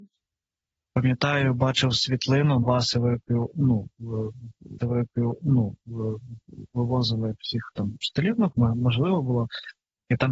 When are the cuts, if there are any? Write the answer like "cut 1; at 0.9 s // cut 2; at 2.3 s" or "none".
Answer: cut 1; at 2.6 s // cut 2; at 4.8 s // cut 3; at 8.5 s